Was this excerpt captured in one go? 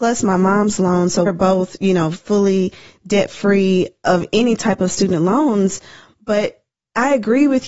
no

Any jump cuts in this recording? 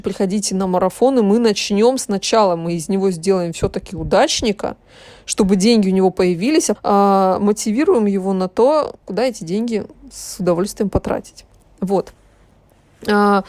yes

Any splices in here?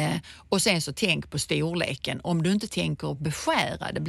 no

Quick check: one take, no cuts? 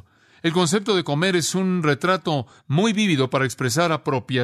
yes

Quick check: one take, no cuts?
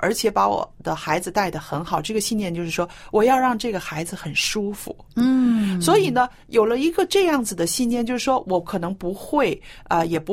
no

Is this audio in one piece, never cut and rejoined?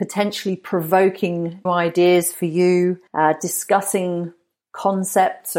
no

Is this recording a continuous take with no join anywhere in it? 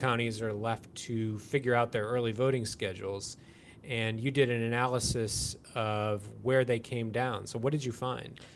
yes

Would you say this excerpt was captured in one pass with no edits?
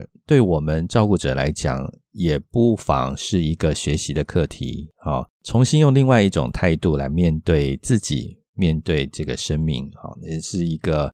yes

